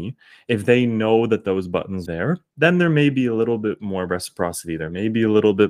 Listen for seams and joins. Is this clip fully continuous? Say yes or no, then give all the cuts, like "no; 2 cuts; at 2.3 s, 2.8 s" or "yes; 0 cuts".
no; 1 cut; at 2.1 s